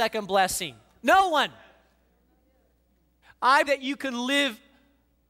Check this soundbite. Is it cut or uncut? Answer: cut